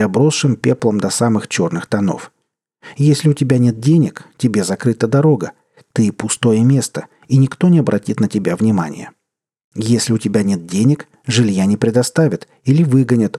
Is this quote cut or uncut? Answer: uncut